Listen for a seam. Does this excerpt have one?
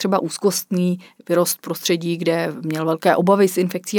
no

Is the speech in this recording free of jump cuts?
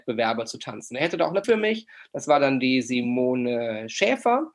no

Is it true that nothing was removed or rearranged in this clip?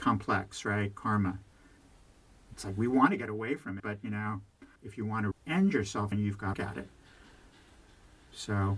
no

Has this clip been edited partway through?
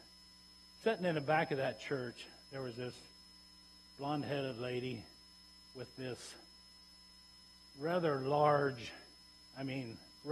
no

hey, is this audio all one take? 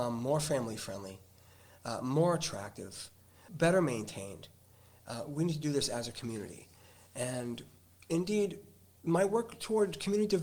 yes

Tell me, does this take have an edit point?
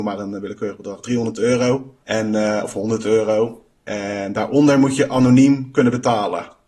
yes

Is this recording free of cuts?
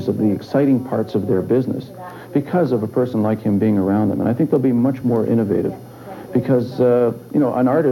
yes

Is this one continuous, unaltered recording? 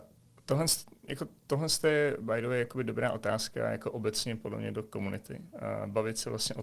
yes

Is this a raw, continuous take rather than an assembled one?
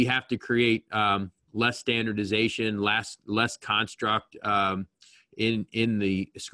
yes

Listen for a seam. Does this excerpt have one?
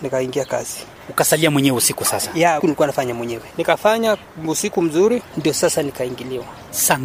yes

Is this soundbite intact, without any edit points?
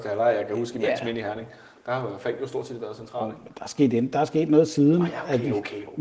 yes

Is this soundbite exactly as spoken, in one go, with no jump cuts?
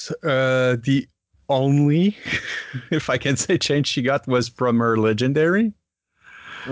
yes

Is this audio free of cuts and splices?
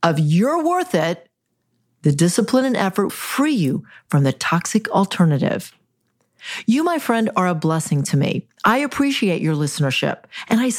no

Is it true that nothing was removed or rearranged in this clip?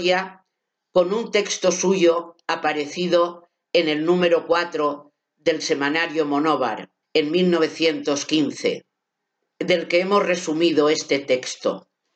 no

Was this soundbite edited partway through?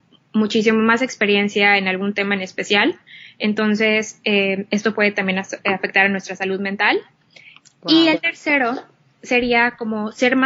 no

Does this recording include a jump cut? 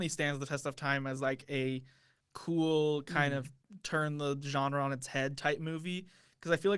no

